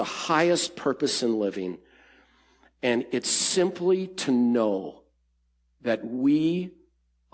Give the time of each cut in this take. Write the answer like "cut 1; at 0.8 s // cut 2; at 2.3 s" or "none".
none